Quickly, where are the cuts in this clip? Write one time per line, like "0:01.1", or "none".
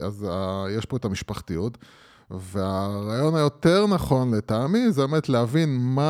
none